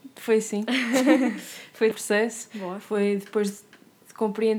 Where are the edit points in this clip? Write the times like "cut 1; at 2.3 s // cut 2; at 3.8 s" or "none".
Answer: cut 1; at 1.9 s